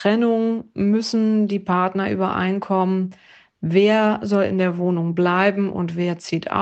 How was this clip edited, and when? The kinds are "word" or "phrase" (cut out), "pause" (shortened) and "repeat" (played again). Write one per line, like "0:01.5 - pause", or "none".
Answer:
none